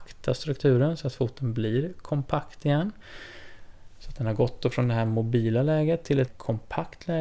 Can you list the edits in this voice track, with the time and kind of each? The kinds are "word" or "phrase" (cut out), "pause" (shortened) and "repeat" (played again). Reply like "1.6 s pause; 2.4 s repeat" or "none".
6.3 s word